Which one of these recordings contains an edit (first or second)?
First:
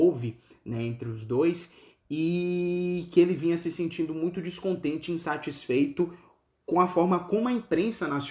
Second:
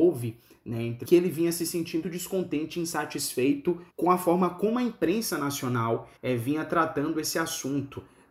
second